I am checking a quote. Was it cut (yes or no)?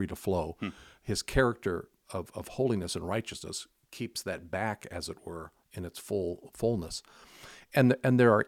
no